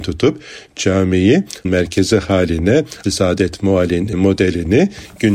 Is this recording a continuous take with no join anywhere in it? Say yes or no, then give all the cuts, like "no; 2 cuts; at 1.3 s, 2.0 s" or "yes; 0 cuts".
no; 3 cuts; at 1.6 s, 3.0 s, 4.1 s